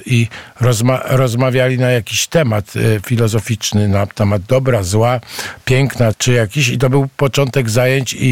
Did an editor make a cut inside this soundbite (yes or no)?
yes